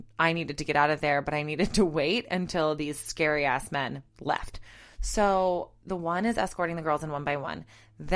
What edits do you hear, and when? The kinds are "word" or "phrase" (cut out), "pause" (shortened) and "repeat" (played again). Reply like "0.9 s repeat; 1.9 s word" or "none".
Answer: 4.1 s pause